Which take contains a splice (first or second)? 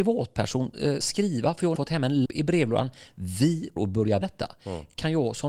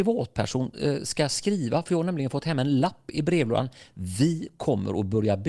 first